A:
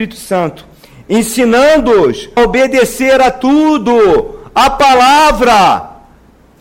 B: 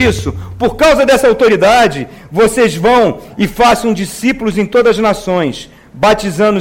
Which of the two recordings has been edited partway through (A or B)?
A